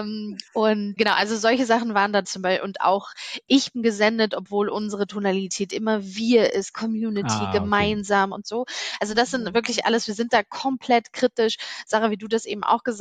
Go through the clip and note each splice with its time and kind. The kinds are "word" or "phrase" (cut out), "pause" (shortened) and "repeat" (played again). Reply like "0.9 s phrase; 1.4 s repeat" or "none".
1.0 s word; 2.2 s phrase; 3.7 s word